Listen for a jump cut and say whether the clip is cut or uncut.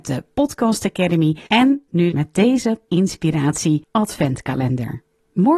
cut